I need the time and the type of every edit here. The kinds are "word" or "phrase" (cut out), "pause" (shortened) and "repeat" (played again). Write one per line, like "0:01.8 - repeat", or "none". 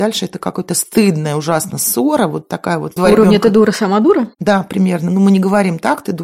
0:03.0 - phrase